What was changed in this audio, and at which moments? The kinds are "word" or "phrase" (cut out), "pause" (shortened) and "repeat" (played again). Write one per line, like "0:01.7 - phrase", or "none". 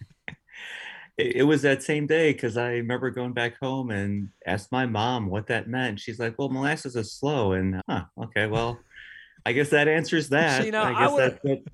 0:07.8 - phrase